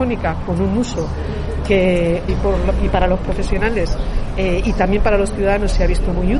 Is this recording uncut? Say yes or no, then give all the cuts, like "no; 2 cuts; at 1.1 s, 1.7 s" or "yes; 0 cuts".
no; 1 cut; at 2.3 s